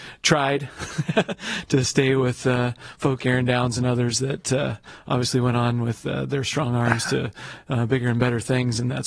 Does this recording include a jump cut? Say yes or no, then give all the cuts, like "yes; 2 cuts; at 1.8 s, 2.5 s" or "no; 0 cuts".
yes; 1 cut; at 3.2 s